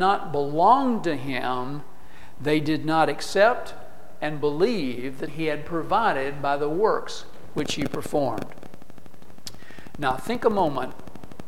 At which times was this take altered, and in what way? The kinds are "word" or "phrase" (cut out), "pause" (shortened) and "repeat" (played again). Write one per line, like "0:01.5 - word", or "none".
0:05.3 - word